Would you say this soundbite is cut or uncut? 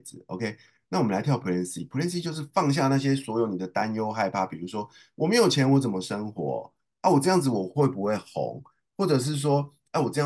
uncut